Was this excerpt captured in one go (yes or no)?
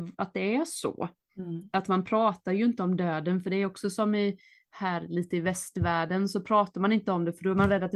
yes